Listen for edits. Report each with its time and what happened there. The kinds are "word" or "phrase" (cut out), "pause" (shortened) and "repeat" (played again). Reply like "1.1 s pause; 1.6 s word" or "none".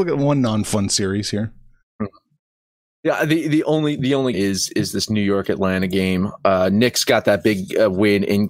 4.3 s phrase